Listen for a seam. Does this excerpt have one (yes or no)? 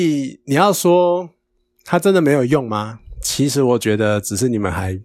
no